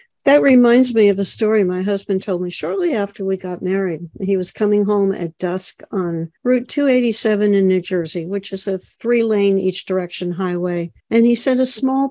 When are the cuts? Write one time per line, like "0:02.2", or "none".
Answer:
0:06.4
0:08.9
0:11.0